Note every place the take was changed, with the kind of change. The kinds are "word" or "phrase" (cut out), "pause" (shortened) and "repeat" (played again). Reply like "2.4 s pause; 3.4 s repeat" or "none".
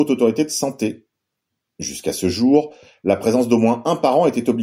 none